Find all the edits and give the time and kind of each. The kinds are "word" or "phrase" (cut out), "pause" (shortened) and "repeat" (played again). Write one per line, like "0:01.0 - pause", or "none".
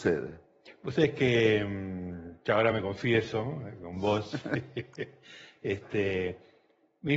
none